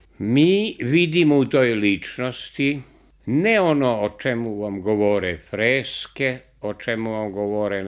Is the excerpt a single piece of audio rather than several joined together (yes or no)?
yes